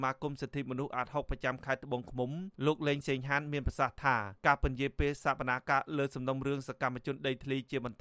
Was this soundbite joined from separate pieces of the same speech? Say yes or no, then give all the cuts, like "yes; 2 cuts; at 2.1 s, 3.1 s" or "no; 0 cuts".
yes; 2 cuts; at 2.5 s, 4.4 s